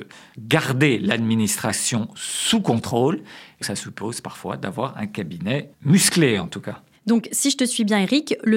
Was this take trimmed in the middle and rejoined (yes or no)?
yes